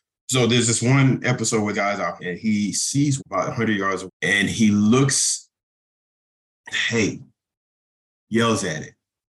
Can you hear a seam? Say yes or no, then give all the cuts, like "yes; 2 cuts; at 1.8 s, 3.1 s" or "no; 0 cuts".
yes; 5 cuts; at 1.7 s, 2.2 s, 3.2 s, 4.1 s, 6.7 s